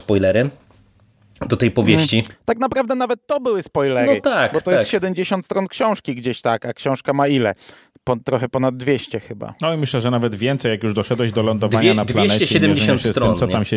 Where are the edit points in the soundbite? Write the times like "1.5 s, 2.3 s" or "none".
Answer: none